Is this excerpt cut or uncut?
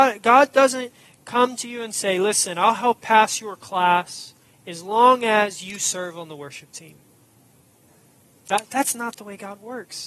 cut